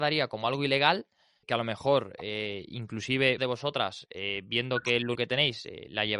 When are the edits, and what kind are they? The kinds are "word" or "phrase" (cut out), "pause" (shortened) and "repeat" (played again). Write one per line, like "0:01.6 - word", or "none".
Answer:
0:01.4 - word
0:03.4 - word
0:05.2 - word